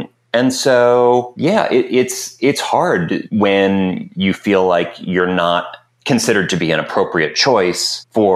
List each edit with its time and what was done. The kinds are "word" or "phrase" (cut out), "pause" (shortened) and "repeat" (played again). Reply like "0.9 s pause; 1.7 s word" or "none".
none